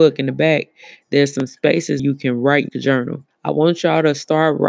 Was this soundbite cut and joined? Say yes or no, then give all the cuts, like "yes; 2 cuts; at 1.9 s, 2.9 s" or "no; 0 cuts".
yes; 3 cuts; at 2.0 s, 2.7 s, 3.3 s